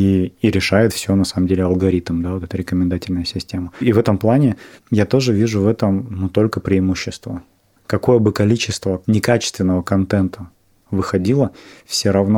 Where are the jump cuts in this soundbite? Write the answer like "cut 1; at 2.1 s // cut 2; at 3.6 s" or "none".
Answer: none